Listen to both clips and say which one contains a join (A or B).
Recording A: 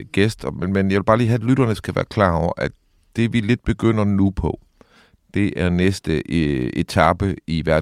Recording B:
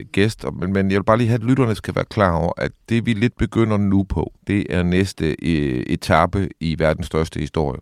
B